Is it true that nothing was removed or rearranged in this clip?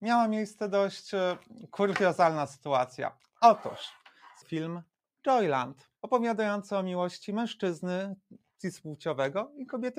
no; 2 cuts; at 4.4 s, 6.0 s

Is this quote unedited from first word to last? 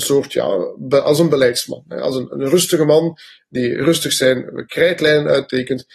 yes; 0 cuts

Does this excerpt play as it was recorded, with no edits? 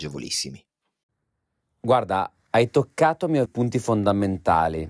no; 1 cut; at 3.5 s

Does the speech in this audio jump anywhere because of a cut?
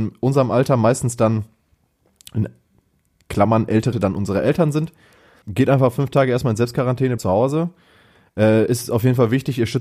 yes; 3 cuts; at 3.9 s, 5.4 s, 7.2 s

